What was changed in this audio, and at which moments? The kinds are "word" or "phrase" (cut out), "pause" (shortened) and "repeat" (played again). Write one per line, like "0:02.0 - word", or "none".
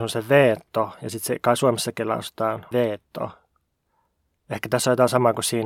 0:02.7 - word